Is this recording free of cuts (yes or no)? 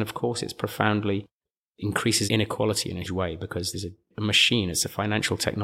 no